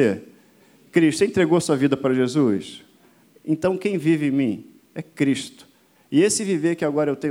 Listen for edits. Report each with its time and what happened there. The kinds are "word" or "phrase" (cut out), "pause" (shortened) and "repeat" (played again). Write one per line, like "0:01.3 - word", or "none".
none